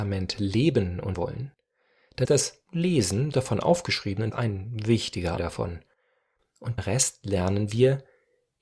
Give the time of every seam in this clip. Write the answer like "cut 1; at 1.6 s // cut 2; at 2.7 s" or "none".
cut 1; at 1.1 s // cut 2; at 2.2 s // cut 3; at 3.3 s // cut 4; at 4.3 s // cut 5; at 5.4 s // cut 6; at 6.8 s